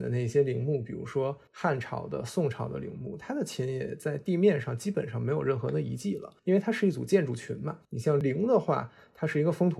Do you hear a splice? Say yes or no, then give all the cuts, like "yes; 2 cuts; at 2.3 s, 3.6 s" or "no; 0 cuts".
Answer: yes; 3 cuts; at 1.5 s, 6.4 s, 7.8 s